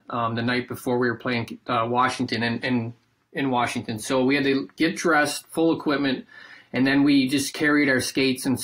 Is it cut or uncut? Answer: uncut